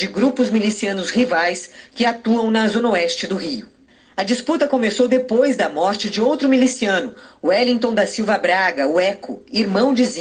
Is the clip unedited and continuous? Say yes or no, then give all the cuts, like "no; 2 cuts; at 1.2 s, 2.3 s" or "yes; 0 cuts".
yes; 0 cuts